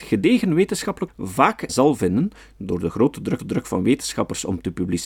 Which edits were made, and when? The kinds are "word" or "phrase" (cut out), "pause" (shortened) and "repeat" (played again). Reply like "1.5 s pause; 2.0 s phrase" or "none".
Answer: 1.1 s word; 1.7 s phrase; 3.4 s repeat

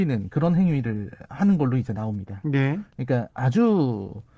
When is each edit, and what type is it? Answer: none

